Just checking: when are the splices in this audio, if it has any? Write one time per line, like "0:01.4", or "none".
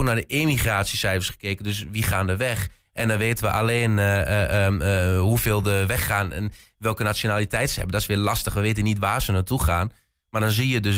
none